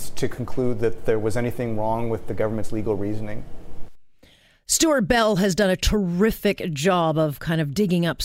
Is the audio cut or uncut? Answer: uncut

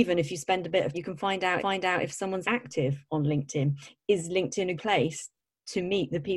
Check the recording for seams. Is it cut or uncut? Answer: cut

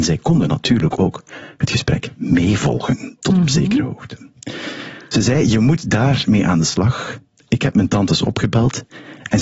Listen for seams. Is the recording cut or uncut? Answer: uncut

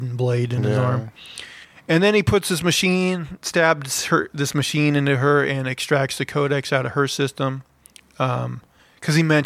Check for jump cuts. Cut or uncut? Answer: uncut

